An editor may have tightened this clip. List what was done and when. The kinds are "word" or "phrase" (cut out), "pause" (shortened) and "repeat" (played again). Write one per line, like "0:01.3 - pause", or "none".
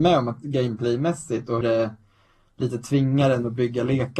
0:01.6 - word